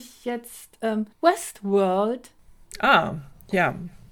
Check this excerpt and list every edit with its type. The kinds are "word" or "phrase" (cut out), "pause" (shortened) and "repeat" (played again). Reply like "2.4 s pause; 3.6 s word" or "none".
1.1 s pause